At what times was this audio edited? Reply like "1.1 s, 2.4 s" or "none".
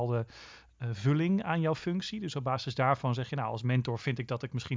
none